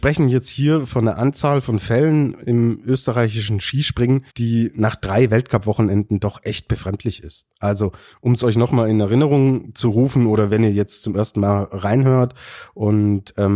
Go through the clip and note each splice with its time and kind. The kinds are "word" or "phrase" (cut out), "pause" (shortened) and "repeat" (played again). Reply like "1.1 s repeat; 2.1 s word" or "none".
4.3 s pause